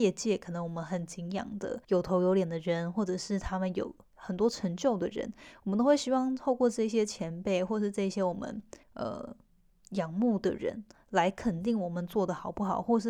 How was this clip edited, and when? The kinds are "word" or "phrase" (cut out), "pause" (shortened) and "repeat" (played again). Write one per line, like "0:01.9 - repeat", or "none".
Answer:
0:01.8 - pause
0:08.8 - pause